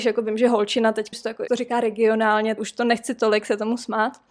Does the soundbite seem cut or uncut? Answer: cut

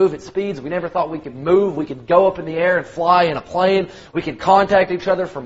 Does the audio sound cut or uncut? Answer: uncut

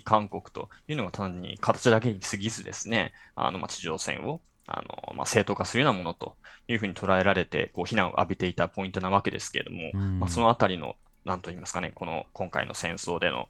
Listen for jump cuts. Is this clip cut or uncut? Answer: uncut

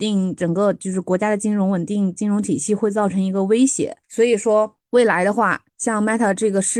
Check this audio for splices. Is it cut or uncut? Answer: cut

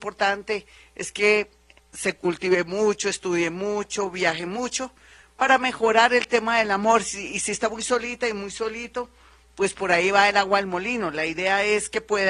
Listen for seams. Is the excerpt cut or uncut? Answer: uncut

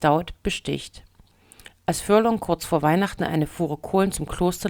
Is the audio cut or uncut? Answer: uncut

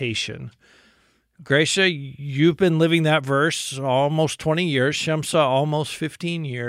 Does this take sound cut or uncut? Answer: uncut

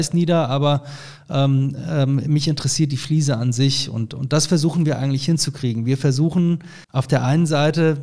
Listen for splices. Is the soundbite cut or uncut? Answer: cut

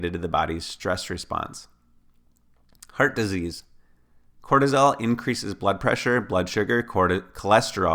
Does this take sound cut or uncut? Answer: uncut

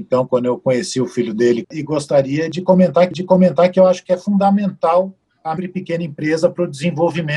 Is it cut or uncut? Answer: cut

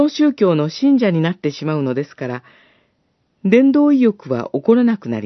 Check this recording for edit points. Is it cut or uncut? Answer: uncut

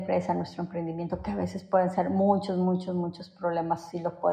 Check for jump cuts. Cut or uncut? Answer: uncut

